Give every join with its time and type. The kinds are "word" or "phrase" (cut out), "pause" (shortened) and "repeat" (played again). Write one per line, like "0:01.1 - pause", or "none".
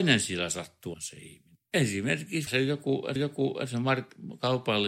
0:00.9 - word
0:02.5 - word
0:03.2 - repeat